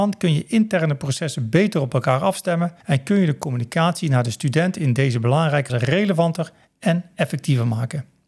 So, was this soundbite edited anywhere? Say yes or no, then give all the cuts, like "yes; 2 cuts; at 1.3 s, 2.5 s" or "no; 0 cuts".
yes; 2 cuts; at 2.8 s, 5.7 s